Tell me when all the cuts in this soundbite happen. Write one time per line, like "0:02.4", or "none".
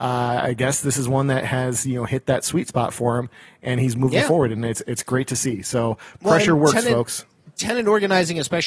none